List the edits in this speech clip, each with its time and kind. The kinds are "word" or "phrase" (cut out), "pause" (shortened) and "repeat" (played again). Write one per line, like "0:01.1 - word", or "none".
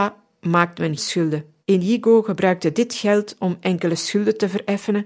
0:01.0 - word
0:01.6 - pause